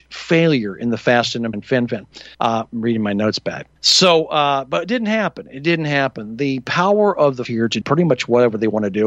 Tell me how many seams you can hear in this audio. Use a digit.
5